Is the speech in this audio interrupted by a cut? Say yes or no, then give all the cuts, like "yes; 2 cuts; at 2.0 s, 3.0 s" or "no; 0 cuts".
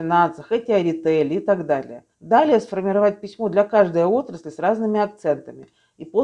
yes; 1 cut; at 2.1 s